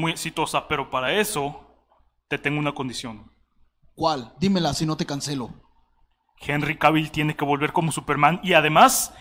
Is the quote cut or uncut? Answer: uncut